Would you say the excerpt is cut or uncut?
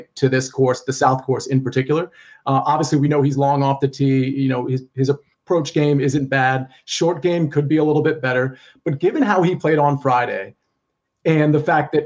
uncut